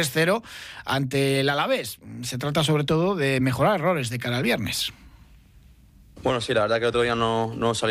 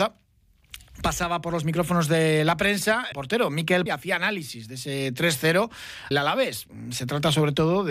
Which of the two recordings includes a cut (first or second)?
second